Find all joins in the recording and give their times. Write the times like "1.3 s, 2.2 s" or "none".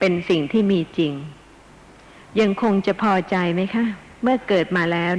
none